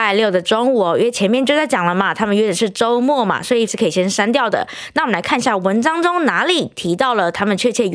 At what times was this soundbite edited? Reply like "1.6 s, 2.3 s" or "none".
3.7 s